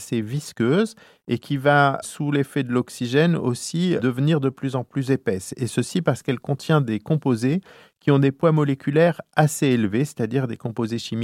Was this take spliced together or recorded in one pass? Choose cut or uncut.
cut